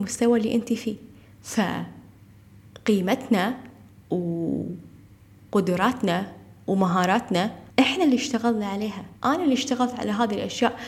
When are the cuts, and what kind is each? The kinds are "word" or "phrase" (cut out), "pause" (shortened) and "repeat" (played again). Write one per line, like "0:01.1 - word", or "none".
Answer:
0:01.3 - pause
0:07.7 - pause
0:09.2 - pause